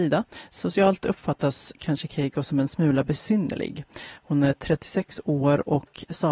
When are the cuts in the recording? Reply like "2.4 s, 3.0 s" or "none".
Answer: none